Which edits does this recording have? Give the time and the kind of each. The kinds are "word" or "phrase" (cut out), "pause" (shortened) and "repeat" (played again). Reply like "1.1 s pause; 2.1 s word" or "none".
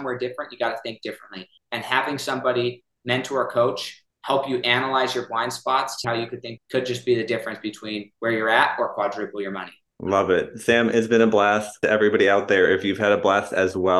6.0 s word; 6.6 s word; 8.1 s pause; 11.8 s phrase